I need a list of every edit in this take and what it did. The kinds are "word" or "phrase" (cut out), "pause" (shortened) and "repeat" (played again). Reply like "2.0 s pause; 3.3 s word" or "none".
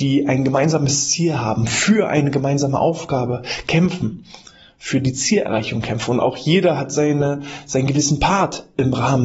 none